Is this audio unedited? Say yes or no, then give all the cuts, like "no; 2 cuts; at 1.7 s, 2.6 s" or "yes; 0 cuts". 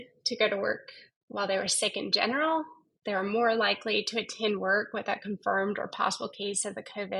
yes; 0 cuts